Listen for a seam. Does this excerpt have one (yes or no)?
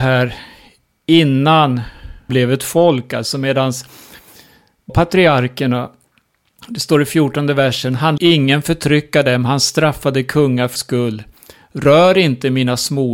yes